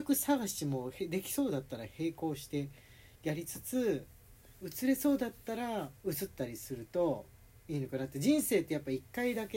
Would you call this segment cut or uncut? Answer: cut